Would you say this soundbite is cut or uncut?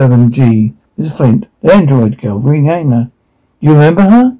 cut